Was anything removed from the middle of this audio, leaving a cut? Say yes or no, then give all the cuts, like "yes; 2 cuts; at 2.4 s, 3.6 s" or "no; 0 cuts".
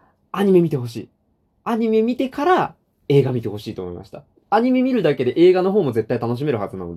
yes; 1 cut; at 4.4 s